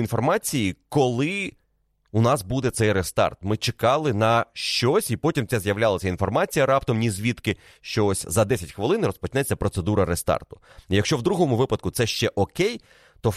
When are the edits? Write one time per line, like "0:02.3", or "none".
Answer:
none